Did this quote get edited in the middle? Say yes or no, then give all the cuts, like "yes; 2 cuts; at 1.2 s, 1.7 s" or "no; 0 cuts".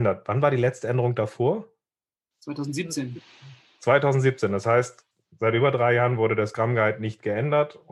no; 0 cuts